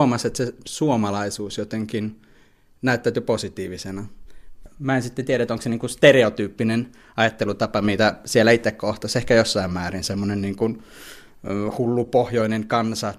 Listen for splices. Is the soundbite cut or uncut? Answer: uncut